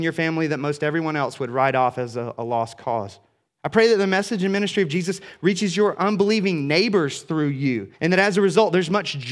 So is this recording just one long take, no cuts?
no; 2 cuts; at 3.5 s, 7.9 s

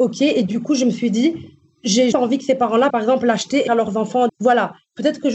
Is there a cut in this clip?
yes; 4 cuts; at 2.1 s, 2.9 s, 3.7 s, 4.3 s

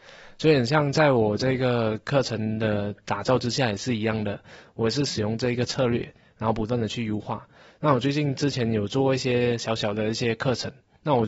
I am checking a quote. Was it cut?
no; 0 cuts

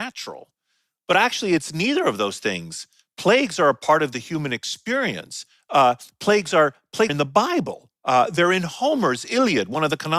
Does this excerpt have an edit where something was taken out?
yes; 1 cut; at 7.1 s

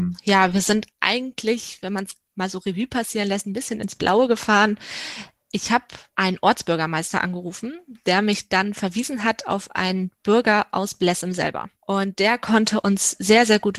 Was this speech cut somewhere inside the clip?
no; 0 cuts

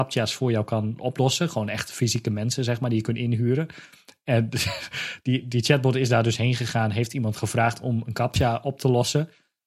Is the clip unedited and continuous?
yes; 0 cuts

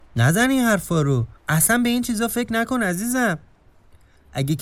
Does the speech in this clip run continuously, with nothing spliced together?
no; 1 cut; at 1.4 s

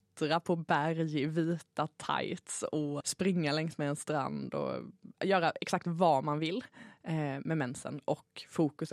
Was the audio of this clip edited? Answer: yes; 2 cuts; at 3.0 s, 5.1 s

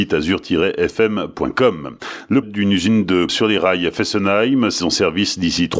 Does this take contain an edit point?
yes; 3 cuts; at 2.4 s, 3.3 s, 4.8 s

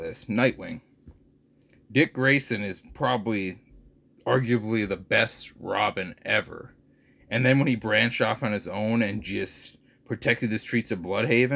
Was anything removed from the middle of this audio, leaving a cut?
no; 0 cuts

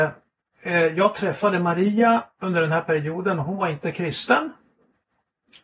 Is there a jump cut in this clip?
no; 0 cuts

